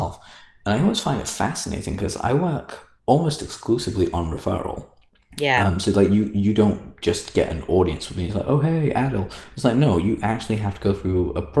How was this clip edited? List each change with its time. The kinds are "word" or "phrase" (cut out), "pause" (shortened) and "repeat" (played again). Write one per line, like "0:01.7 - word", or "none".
0:03.0 - pause
0:05.1 - pause

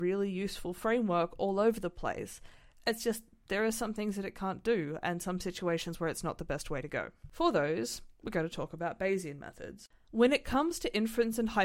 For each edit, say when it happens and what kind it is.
none

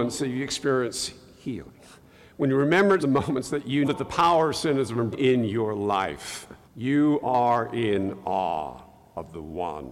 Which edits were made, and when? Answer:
0:03.0 - word
0:03.8 - word
0:05.1 - word
0:06.6 - pause

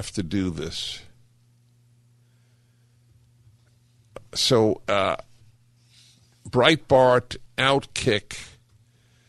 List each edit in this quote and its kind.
0:07.5 - word

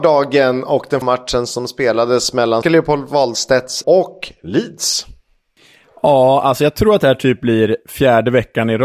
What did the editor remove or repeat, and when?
0:01.0 - word
0:02.6 - word
0:03.8 - word

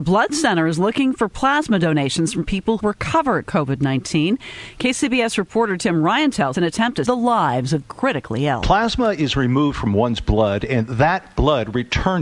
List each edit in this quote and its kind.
0:02.8 - phrase
0:03.5 - word
0:06.5 - phrase
0:07.0 - word
0:07.8 - phrase

